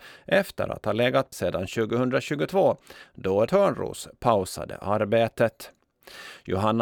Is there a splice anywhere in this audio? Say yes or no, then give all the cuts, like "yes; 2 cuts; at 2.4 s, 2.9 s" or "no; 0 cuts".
yes; 2 cuts; at 1.3 s, 3.5 s